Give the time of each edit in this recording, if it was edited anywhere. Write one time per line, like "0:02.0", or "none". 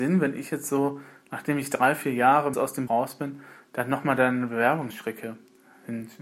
0:02.5
0:02.9
0:04.9